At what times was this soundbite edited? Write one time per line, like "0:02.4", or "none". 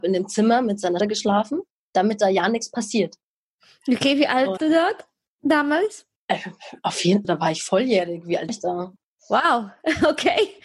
0:01.0
0:04.6
0:07.2
0:08.5